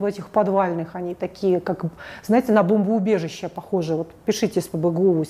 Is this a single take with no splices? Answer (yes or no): yes